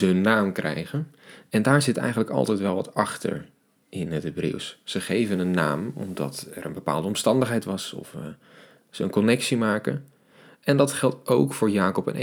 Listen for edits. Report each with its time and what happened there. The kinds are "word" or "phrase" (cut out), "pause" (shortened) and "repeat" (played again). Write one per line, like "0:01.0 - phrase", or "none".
none